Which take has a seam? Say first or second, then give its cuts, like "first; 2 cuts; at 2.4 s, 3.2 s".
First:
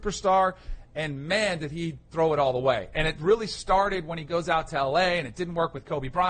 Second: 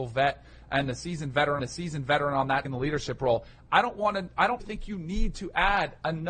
second; 3 cuts; at 1.6 s, 2.6 s, 4.6 s